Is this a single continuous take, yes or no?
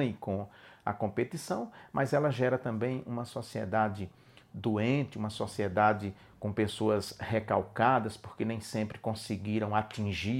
yes